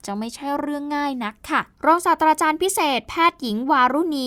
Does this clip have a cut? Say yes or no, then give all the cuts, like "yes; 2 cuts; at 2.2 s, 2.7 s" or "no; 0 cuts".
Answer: yes; 1 cut; at 1.7 s